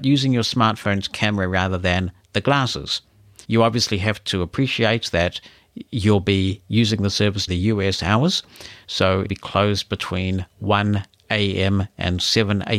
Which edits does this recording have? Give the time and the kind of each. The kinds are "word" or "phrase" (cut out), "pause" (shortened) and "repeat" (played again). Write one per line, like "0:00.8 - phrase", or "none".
0:03.4 - pause
0:07.5 - word
0:09.3 - word